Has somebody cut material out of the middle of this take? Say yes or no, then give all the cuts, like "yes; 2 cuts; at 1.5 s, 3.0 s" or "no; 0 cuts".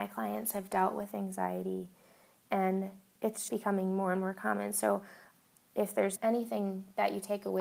yes; 2 cuts; at 3.5 s, 6.2 s